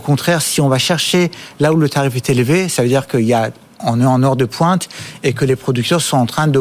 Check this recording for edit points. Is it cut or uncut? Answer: uncut